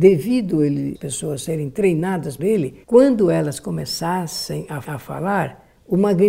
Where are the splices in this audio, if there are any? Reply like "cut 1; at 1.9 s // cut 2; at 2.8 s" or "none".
cut 1; at 0.9 s // cut 2; at 2.4 s // cut 3; at 2.8 s // cut 4; at 4.8 s